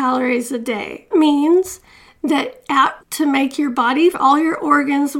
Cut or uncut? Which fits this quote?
cut